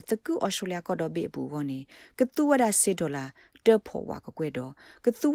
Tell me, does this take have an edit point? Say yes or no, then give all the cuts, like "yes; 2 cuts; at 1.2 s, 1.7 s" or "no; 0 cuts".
no; 0 cuts